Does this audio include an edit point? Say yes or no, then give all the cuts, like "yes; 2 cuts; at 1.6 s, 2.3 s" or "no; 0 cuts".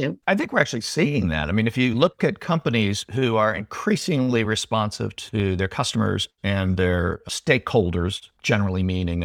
no; 0 cuts